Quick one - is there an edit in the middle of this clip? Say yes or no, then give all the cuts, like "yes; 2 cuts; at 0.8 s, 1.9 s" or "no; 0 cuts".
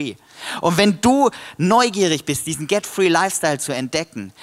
no; 0 cuts